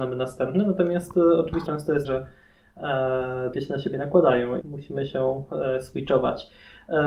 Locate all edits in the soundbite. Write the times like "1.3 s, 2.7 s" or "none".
1.7 s, 2.0 s, 3.5 s, 4.6 s